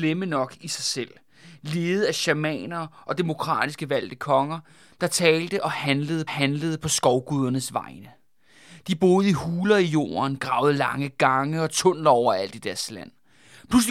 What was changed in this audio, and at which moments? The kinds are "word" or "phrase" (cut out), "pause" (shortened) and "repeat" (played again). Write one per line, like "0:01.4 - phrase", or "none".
0:06.3 - repeat